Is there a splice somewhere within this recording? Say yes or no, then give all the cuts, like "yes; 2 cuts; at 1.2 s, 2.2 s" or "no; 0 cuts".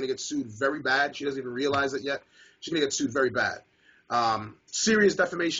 no; 0 cuts